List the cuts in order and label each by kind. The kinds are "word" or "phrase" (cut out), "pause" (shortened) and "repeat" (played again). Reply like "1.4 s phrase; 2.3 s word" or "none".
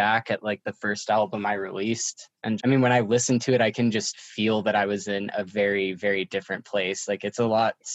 2.6 s word